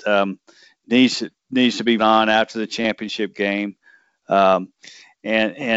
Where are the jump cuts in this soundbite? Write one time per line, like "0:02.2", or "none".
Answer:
0:02.0